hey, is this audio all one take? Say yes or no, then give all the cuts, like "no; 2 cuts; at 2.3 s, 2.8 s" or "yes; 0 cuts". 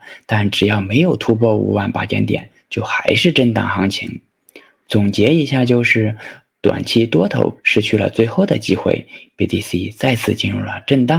yes; 0 cuts